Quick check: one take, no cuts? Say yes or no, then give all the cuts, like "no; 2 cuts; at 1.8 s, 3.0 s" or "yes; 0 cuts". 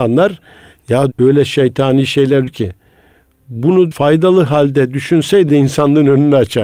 no; 4 cuts; at 1.1 s, 2.5 s, 3.9 s, 5.5 s